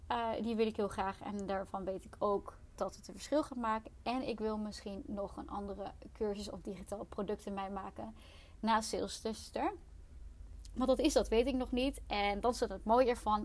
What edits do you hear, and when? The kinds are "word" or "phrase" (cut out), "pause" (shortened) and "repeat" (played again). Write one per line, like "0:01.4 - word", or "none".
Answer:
none